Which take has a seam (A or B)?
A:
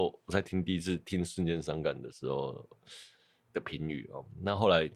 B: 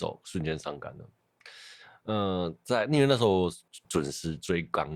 B